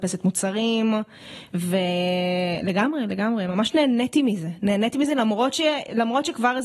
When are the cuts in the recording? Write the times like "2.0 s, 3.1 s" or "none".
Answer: none